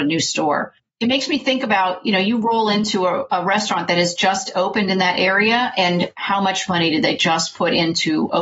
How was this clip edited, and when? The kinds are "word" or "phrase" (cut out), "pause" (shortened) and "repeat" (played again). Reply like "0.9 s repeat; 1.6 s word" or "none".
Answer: none